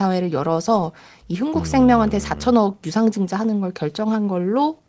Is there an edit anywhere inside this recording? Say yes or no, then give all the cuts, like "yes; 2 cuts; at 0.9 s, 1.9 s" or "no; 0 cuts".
no; 0 cuts